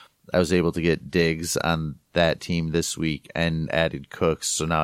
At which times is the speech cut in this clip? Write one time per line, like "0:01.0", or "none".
none